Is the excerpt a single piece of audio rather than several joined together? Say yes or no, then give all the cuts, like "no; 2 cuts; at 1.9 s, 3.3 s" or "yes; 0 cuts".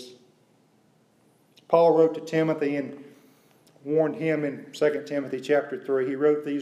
yes; 0 cuts